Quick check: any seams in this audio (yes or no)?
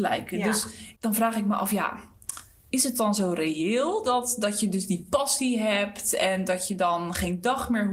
yes